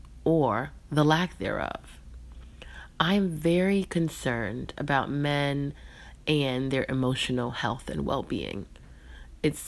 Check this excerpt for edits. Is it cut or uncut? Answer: uncut